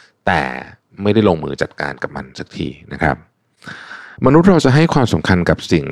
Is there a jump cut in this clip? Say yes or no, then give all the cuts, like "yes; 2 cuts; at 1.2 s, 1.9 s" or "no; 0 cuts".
yes; 1 cut; at 4.2 s